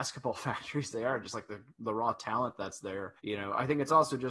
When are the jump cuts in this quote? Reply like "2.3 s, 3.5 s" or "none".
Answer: 3.2 s